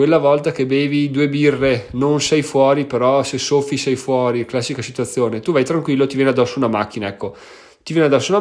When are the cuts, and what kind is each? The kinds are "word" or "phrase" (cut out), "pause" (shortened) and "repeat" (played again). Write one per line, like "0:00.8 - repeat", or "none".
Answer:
none